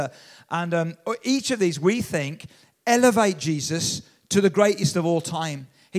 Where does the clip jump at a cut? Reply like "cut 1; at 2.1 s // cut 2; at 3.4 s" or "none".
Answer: none